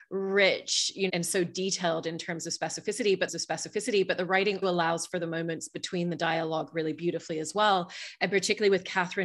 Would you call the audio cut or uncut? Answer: cut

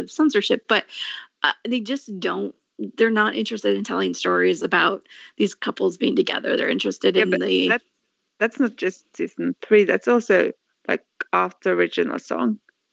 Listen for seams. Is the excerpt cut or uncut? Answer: uncut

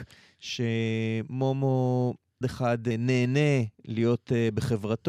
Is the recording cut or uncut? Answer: cut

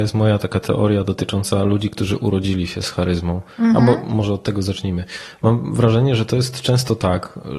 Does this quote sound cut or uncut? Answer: uncut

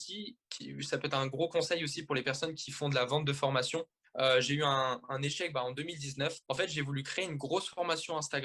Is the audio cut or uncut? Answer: cut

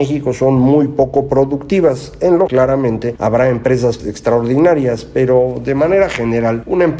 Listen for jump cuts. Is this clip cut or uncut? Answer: cut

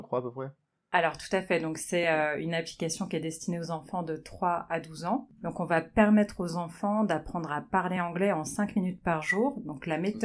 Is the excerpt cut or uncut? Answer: uncut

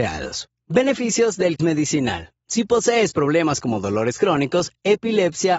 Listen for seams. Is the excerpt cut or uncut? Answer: cut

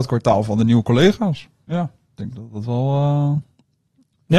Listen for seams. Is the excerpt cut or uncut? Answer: uncut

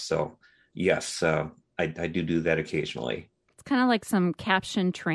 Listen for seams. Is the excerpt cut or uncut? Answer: uncut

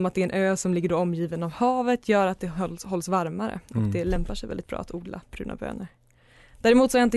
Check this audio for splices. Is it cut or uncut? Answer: uncut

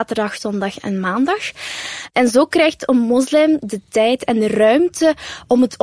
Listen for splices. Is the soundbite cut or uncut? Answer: uncut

